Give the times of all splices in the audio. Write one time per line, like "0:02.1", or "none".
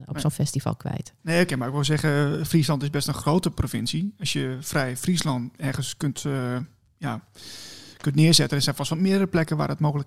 none